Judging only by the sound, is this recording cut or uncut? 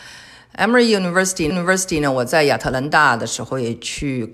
cut